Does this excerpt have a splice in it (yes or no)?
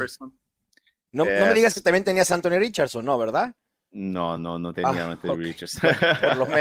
no